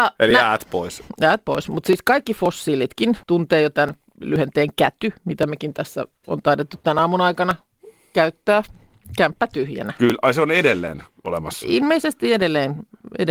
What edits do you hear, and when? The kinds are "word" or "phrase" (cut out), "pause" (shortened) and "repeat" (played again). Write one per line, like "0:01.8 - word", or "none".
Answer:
0:03.2 - pause
0:05.2 - pause